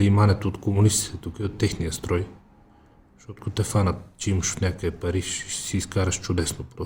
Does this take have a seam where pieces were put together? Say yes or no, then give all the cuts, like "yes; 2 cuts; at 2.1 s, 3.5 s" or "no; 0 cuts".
no; 0 cuts